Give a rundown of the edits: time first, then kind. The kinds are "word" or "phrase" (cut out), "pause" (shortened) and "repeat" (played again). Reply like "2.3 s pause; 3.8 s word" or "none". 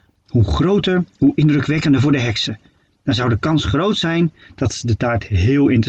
none